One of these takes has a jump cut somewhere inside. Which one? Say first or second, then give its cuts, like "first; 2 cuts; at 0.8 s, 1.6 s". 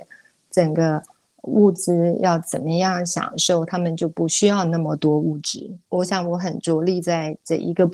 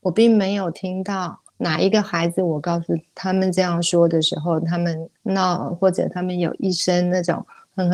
second; 2 cuts; at 1.5 s, 5.2 s